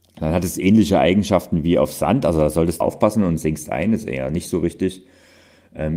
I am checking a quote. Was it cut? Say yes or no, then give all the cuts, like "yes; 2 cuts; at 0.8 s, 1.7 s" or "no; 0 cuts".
yes; 1 cut; at 2.8 s